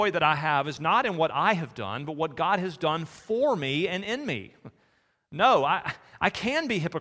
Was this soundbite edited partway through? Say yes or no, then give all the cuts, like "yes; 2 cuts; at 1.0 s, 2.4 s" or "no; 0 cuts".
no; 0 cuts